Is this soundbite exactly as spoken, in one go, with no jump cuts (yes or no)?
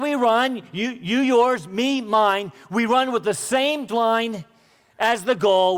no